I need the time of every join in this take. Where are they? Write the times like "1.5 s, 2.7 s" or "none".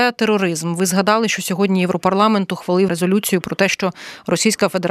2.9 s